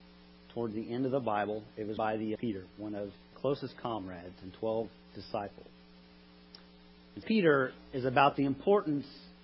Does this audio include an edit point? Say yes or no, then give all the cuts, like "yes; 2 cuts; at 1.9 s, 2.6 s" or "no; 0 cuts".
yes; 4 cuts; at 2.0 s, 2.4 s, 3.3 s, 7.2 s